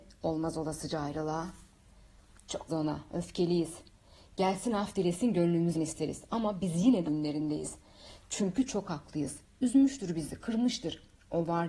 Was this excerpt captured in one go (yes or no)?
no